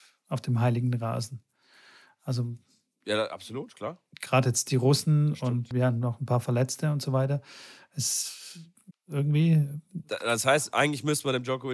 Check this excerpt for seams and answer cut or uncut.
cut